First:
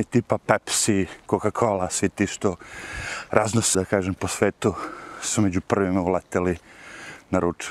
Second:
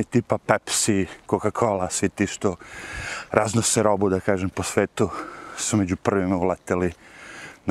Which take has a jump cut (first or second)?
first